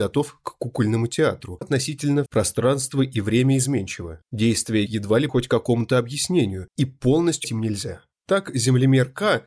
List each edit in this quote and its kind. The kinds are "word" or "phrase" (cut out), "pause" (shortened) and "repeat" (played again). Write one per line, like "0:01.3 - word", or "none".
0:01.6 - phrase
0:02.3 - word
0:04.9 - word
0:05.3 - word
0:07.4 - word